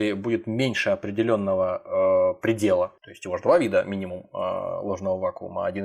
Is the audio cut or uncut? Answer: cut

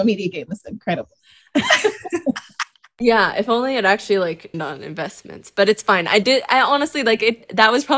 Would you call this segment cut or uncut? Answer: cut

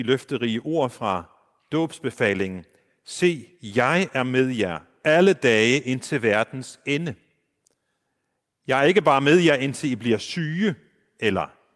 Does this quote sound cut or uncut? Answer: uncut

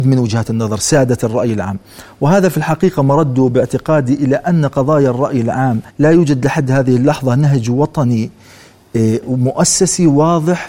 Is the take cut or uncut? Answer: cut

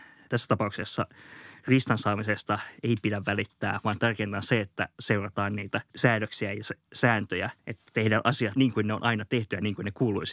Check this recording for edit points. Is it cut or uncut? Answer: cut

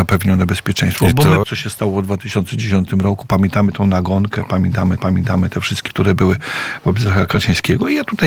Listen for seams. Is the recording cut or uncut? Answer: cut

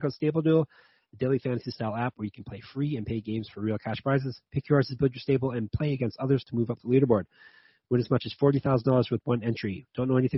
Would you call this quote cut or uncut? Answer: uncut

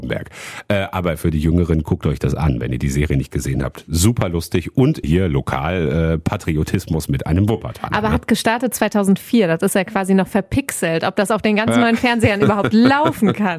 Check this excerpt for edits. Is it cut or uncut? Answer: cut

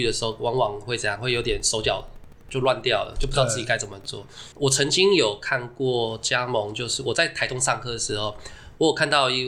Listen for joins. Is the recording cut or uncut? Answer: cut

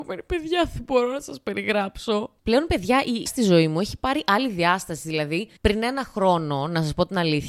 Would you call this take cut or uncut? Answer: cut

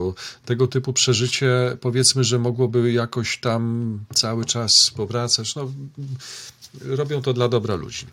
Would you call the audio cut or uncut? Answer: uncut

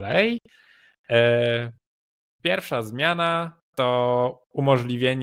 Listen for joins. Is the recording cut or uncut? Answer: uncut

